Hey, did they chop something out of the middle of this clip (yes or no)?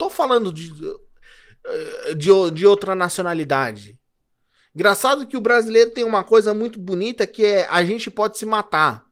no